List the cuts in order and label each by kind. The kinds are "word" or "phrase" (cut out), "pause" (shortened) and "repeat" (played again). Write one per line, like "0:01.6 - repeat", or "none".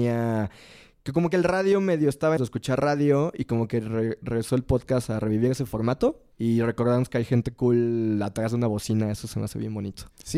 0:02.4 - phrase
0:06.3 - pause

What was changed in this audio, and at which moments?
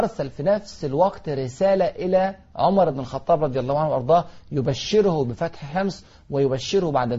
none

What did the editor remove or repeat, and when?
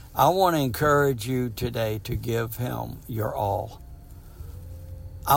none

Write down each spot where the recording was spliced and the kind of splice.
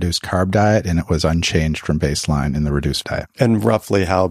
0:03.0 - word

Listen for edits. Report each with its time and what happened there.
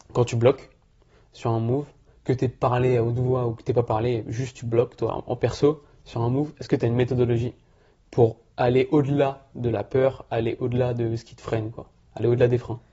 0:08.5 - pause

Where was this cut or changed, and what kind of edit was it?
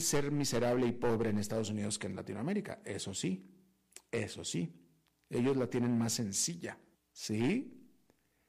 0:06.9 - pause

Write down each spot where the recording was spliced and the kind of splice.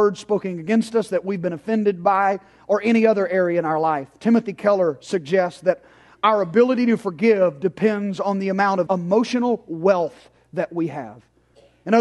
0:08.9 - word

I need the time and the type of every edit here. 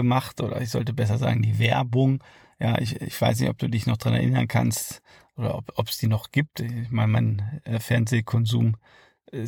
none

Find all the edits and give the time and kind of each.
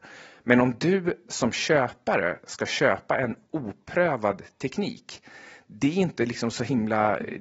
none

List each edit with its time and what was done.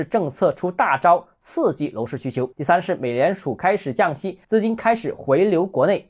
0:02.5 - pause
0:04.4 - pause

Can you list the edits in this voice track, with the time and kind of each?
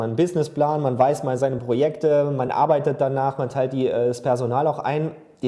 none

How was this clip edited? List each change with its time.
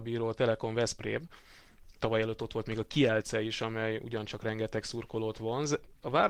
none

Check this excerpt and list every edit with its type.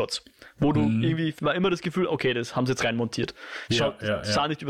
0:01.4 - word

